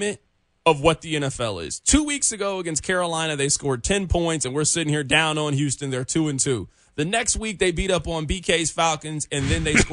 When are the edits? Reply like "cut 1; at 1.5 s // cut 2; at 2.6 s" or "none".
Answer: none